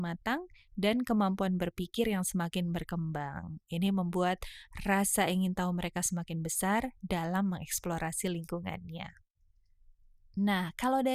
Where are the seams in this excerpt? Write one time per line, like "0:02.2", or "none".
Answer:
none